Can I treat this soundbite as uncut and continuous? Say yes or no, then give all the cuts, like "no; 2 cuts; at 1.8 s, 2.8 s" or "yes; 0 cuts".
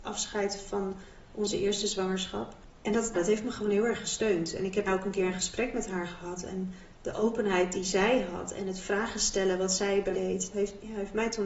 no; 4 cuts; at 3.1 s, 4.9 s, 10.1 s, 10.5 s